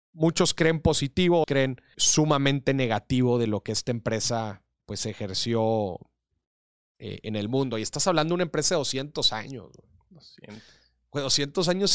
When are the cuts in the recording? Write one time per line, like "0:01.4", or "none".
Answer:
0:01.4
0:01.9